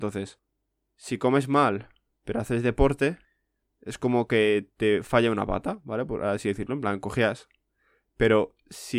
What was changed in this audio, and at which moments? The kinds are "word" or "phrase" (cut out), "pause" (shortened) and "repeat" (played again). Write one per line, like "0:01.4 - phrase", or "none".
none